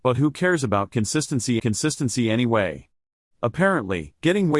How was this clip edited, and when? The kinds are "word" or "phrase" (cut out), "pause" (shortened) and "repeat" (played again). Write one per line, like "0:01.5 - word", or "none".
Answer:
0:01.6 - repeat